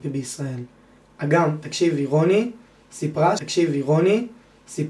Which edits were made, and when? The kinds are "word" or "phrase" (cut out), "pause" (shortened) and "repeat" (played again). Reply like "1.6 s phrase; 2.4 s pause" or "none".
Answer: 3.4 s repeat